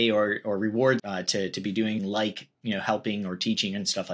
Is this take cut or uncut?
cut